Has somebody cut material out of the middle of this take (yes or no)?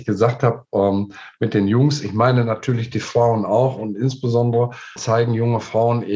yes